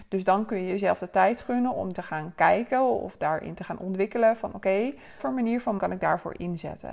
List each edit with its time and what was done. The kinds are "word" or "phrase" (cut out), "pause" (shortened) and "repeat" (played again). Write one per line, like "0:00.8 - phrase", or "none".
0:01.9 - word
0:05.2 - word
0:05.8 - word